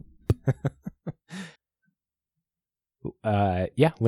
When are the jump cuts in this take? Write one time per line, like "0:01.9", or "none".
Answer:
0:01.6